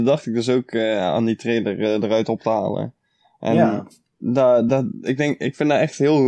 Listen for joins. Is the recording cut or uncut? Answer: uncut